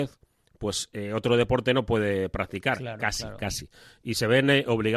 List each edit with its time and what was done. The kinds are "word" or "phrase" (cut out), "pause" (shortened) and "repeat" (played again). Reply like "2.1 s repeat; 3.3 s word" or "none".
none